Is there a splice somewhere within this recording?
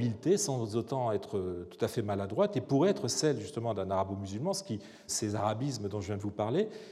yes; 1 cut; at 5.1 s

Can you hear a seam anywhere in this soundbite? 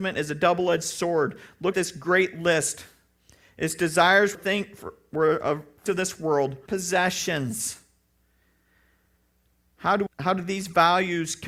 yes; 5 cuts; at 1.7 s, 4.3 s, 5.9 s, 6.7 s, 10.1 s

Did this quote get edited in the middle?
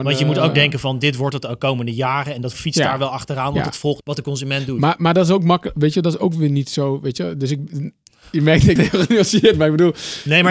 yes; 3 cuts; at 2.5 s, 4.0 s, 8.8 s

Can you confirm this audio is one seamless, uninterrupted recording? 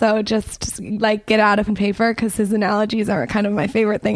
no; 1 cut; at 1.7 s

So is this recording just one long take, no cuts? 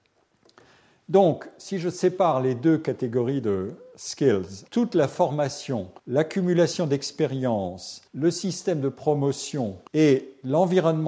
no; 4 cuts; at 4.7 s, 6.0 s, 8.1 s, 9.9 s

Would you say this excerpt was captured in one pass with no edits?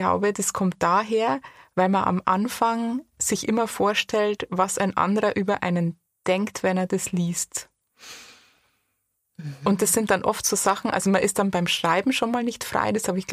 yes; 0 cuts

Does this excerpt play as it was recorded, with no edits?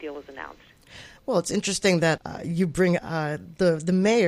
no; 2 cuts; at 2.2 s, 3.0 s

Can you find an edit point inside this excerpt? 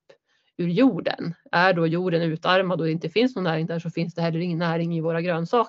no; 0 cuts

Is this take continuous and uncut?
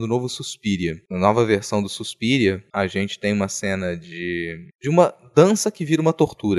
yes; 0 cuts

